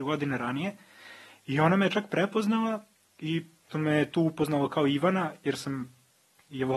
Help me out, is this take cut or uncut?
cut